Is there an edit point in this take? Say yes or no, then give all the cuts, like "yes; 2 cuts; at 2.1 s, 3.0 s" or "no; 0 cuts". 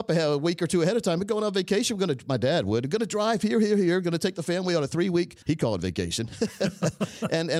yes; 1 cut; at 5.4 s